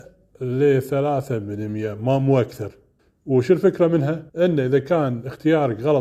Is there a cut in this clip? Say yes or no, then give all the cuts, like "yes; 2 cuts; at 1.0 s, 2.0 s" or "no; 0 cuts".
yes; 2 cuts; at 3.0 s, 4.3 s